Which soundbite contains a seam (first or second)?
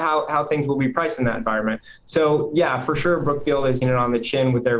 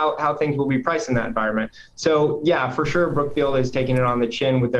first